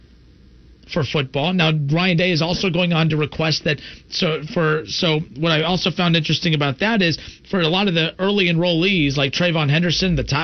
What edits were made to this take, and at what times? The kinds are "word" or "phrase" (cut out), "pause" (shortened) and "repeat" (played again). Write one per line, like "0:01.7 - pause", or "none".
none